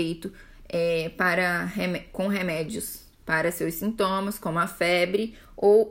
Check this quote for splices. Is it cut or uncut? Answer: uncut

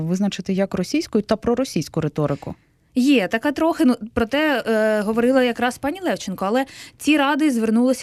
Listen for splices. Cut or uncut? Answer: uncut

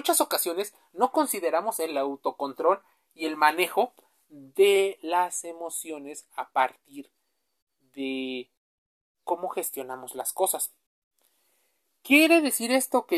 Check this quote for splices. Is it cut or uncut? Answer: uncut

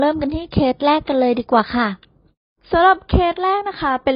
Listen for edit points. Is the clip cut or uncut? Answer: uncut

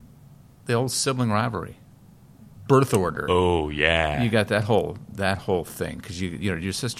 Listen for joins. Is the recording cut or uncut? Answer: uncut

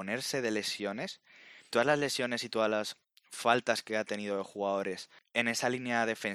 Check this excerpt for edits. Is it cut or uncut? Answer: cut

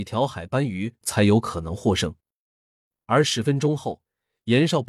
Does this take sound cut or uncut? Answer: uncut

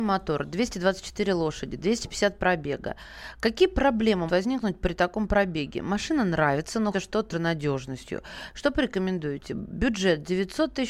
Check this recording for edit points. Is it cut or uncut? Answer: cut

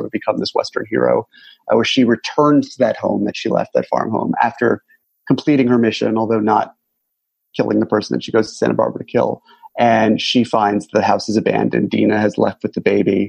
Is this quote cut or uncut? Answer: uncut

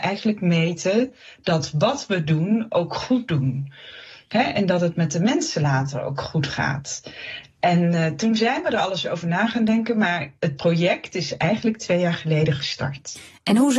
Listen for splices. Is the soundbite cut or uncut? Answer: uncut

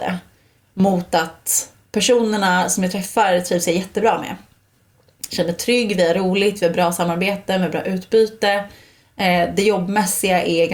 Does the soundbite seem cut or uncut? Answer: uncut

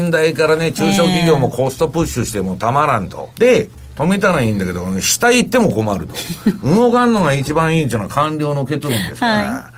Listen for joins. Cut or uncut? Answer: cut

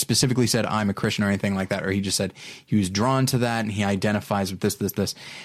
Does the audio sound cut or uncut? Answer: uncut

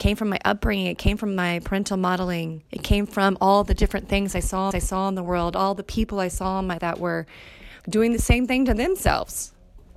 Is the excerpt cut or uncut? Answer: cut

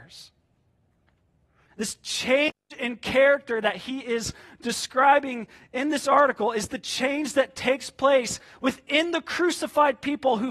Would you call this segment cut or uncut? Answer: uncut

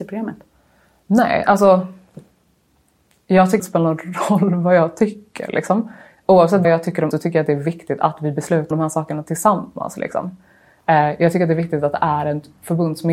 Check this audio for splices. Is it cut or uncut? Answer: cut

